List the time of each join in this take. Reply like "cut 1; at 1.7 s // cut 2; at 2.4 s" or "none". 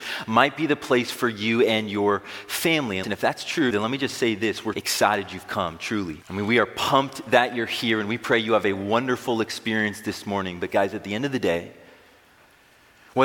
cut 1; at 3.0 s // cut 2; at 3.7 s // cut 3; at 4.7 s // cut 4; at 6.2 s